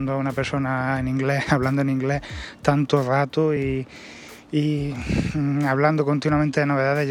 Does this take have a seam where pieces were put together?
no; 0 cuts

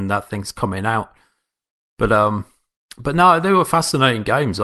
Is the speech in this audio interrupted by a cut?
no; 0 cuts

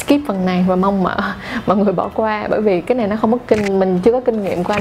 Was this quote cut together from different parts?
no; 0 cuts

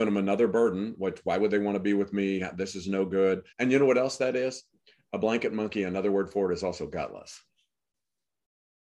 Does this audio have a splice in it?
yes; 1 cut; at 3.5 s

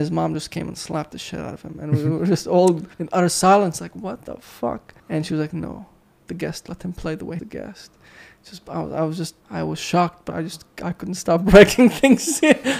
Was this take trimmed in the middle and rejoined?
yes; 5 cuts; at 2.9 s, 5.0 s, 7.4 s, 9.4 s, 10.3 s

